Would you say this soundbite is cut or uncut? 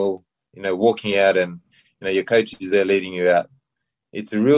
uncut